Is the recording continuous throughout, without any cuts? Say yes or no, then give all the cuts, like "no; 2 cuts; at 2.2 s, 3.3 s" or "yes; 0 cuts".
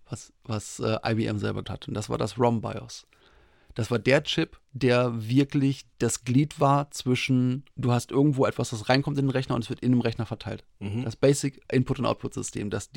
no; 5 cuts; at 1.6 s, 4.6 s, 5.9 s, 7.7 s, 11.7 s